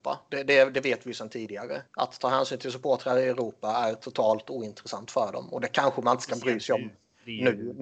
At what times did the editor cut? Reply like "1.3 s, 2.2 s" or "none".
1.9 s